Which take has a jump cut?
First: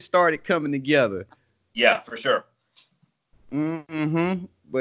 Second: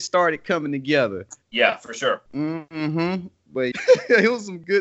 second; 3 cuts; at 1.4 s, 2.3 s, 3.7 s

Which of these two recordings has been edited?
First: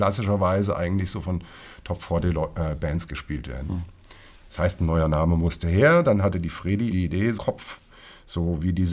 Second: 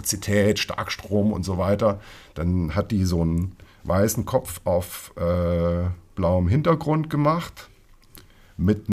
first; 2 cuts; at 6.9 s, 7.4 s

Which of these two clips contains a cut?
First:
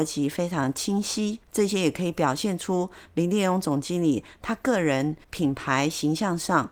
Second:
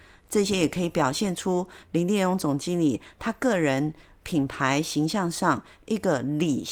first; 2 cuts; at 1.4 s, 5.2 s

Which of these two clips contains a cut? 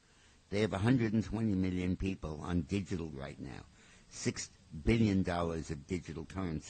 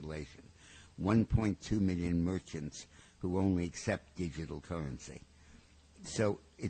first; 1 cut; at 3.1 s

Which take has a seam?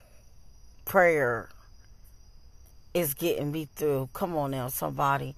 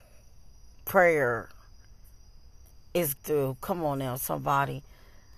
second; 1 cut; at 3.2 s

